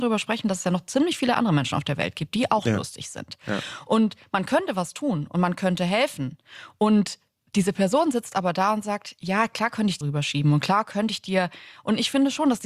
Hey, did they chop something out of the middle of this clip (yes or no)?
yes